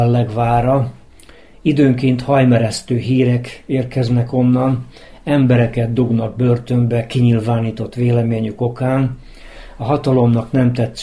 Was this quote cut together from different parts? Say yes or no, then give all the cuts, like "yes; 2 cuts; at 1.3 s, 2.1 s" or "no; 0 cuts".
no; 0 cuts